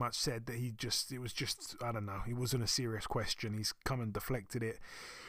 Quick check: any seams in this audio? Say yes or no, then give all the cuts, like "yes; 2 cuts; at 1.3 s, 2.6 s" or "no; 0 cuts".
no; 0 cuts